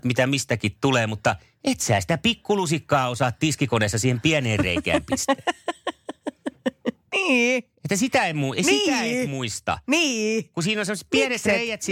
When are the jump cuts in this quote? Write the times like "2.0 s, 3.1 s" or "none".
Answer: none